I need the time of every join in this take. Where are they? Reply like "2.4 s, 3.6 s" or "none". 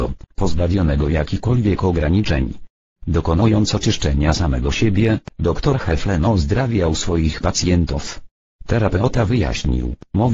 none